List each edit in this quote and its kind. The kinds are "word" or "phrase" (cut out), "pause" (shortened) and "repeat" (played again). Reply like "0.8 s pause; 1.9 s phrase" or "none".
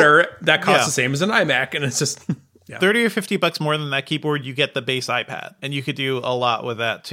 none